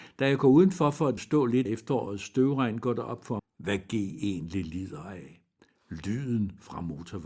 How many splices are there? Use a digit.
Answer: 3